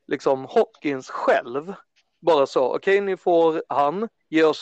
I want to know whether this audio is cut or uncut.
uncut